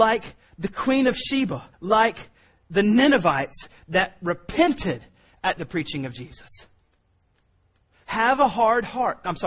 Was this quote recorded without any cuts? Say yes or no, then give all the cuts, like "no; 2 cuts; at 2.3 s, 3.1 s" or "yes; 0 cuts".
no; 1 cut; at 1.7 s